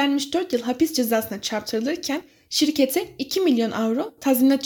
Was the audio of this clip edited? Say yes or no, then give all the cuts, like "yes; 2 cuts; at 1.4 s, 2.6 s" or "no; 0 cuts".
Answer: no; 0 cuts